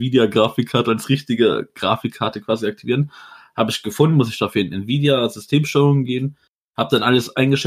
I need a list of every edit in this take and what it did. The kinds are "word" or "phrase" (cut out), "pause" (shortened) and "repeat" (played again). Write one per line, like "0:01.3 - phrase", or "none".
none